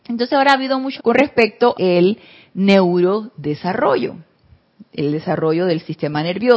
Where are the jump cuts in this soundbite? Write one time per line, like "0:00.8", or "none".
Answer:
0:01.0
0:01.7